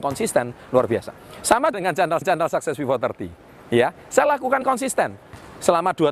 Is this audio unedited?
no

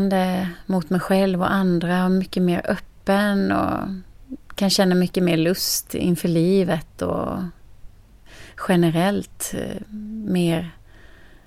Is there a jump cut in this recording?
no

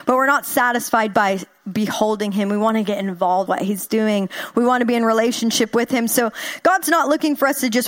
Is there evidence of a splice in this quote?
yes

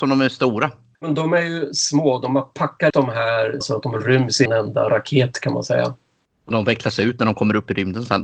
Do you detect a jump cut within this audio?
yes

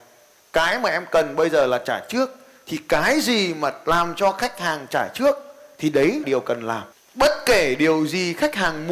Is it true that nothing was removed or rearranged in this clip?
no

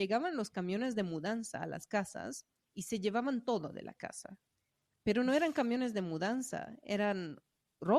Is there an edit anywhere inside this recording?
no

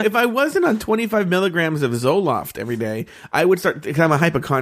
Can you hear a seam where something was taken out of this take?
no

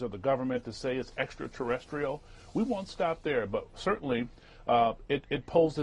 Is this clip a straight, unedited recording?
yes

